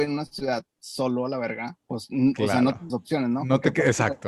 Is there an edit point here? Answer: yes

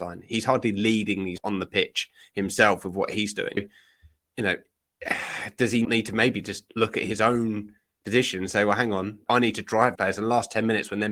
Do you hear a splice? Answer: yes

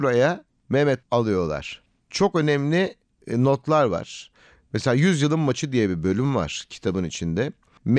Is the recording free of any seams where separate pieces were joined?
no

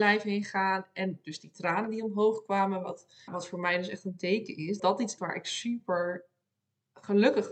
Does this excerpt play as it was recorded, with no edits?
no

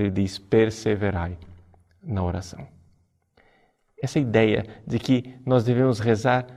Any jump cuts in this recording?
no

